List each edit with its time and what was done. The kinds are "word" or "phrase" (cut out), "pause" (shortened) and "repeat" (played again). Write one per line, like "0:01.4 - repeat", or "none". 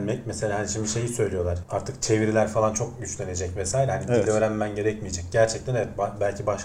0:01.6 - word